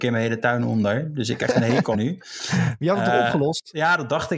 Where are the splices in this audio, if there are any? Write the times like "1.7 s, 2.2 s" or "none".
1.4 s, 1.9 s